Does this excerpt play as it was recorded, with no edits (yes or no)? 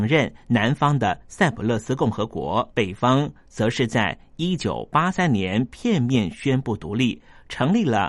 no